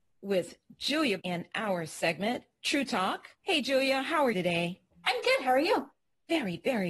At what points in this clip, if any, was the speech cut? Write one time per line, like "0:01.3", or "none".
0:01.2
0:03.3
0:04.3